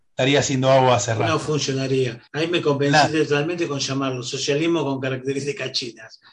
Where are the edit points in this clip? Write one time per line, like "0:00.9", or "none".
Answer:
0:02.3